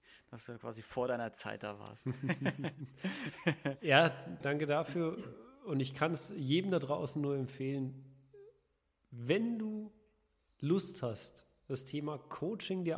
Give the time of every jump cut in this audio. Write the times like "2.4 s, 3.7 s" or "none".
4.4 s